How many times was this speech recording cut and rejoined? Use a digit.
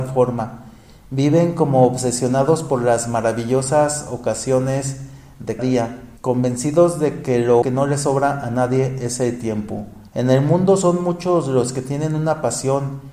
4